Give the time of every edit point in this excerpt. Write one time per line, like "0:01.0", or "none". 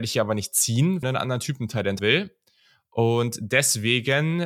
0:01.0
0:02.0